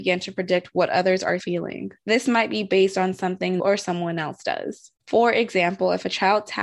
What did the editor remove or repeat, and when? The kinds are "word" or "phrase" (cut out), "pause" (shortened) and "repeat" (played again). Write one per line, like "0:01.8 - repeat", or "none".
0:01.4 - phrase
0:02.0 - pause
0:03.6 - phrase
0:05.0 - pause